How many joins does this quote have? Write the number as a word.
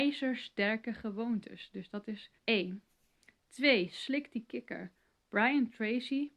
one